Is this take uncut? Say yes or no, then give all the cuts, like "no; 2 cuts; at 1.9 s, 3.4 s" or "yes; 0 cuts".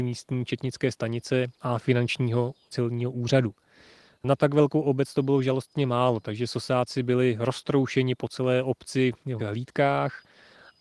no; 1 cut; at 9.4 s